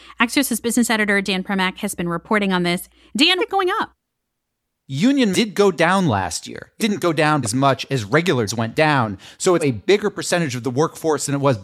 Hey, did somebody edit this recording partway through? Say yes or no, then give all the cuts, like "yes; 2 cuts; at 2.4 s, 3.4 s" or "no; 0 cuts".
yes; 6 cuts; at 3.4 s, 5.3 s, 6.8 s, 7.4 s, 8.5 s, 9.6 s